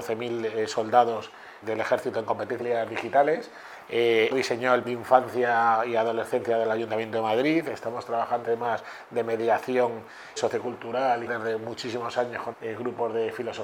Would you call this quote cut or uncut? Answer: cut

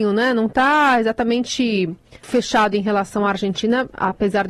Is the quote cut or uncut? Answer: cut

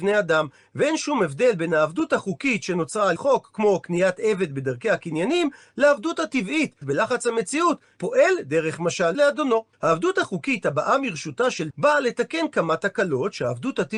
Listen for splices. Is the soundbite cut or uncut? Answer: cut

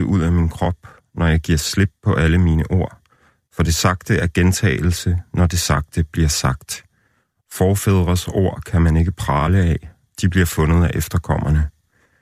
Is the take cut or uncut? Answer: uncut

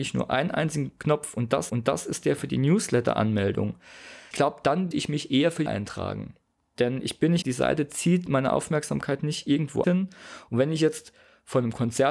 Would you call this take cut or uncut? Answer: cut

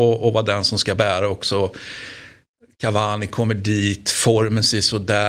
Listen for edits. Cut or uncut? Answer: uncut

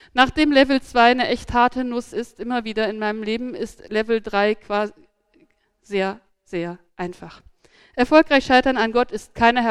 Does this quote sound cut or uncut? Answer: uncut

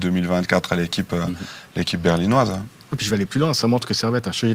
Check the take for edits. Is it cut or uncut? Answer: uncut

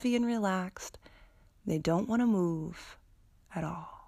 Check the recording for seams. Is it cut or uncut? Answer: uncut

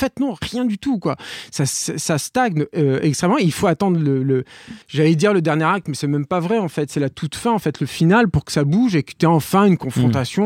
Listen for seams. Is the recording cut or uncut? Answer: cut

